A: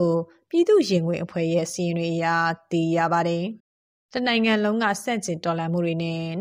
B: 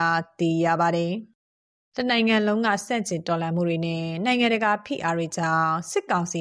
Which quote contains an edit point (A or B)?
A